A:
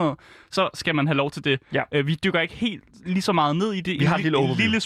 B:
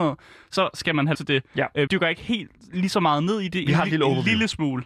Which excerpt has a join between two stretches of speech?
B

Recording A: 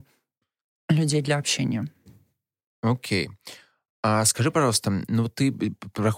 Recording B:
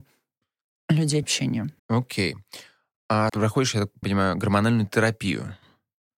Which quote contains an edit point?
B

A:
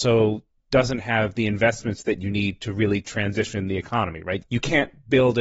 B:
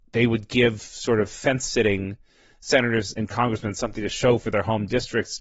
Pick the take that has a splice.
A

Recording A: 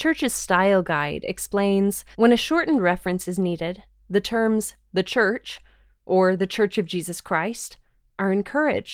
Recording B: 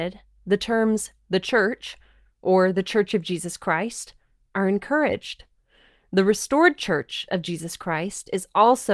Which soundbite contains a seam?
A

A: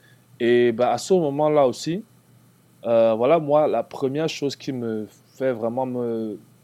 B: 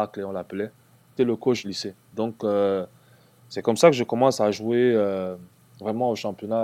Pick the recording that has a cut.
B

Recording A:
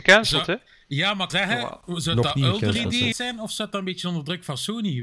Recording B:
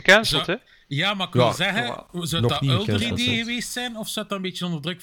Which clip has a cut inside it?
A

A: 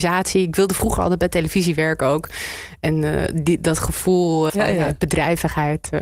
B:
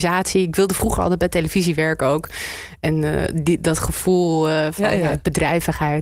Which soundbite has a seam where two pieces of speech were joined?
A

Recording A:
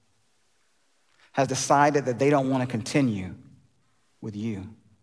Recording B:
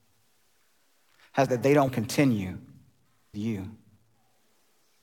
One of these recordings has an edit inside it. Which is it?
B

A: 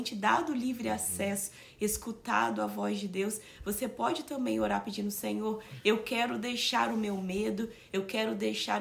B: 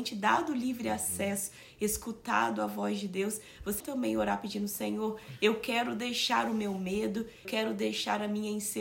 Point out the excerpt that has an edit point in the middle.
B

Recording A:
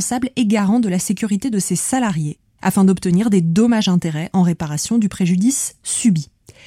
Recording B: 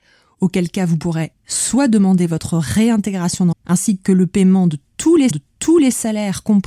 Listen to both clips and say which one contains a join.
B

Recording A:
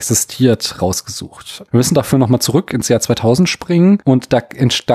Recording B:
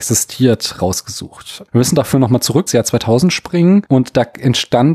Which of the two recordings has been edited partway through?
B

